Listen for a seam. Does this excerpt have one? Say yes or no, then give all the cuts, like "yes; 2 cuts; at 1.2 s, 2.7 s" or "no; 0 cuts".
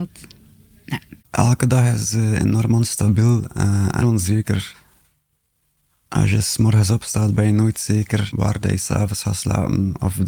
yes; 2 cuts; at 1.2 s, 4.0 s